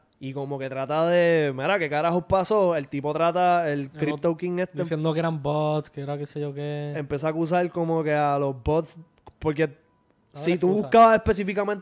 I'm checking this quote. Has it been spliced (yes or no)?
no